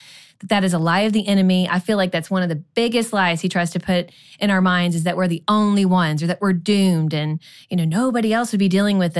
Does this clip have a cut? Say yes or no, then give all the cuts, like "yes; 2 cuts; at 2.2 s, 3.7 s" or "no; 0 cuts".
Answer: no; 0 cuts